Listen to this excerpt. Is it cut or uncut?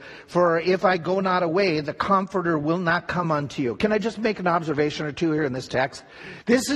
uncut